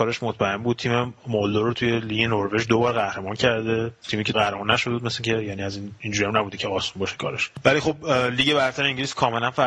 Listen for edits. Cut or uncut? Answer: cut